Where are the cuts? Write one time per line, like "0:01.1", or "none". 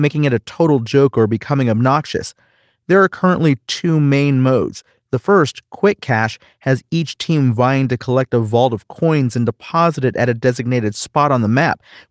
none